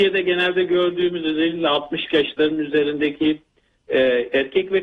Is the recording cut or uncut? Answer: uncut